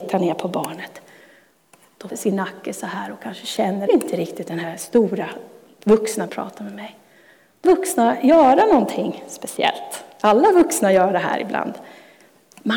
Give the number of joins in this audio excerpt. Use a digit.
4